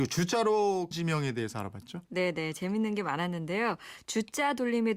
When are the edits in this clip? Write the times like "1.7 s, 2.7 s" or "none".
0.9 s